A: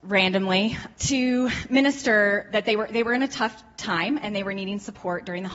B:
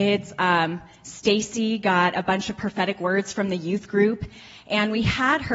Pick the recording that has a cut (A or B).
A